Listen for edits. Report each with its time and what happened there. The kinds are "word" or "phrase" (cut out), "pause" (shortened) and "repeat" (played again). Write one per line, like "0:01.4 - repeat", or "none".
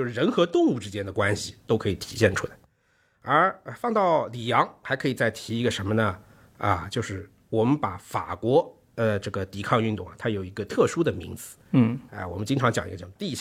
none